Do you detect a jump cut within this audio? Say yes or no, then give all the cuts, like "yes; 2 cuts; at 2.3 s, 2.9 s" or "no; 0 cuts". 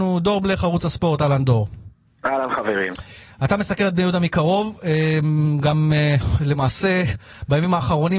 no; 0 cuts